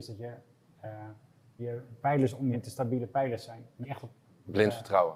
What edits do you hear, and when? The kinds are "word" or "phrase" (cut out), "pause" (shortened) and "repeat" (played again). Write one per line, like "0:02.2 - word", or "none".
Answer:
0:01.6 - word
0:02.5 - word
0:03.8 - word